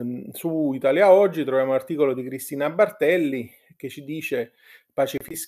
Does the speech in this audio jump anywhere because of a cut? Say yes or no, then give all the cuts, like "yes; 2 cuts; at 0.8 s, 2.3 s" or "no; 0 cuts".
no; 0 cuts